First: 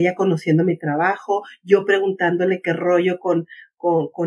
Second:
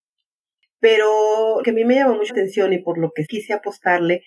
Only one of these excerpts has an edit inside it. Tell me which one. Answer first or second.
second